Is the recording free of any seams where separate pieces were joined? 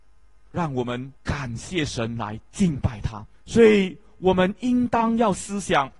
no; 2 cuts; at 1.2 s, 3.3 s

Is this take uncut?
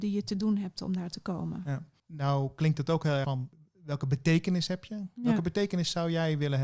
no; 1 cut; at 3.2 s

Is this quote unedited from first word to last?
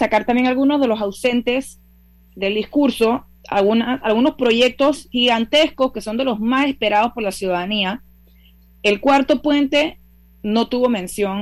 yes; 0 cuts

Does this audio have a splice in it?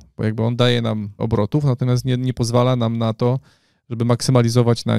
yes; 1 cut; at 1.2 s

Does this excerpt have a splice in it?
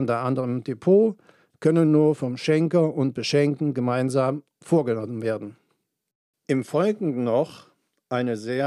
no; 0 cuts

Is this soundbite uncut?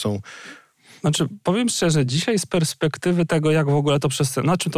yes; 0 cuts

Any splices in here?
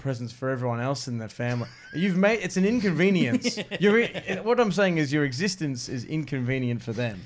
no; 0 cuts

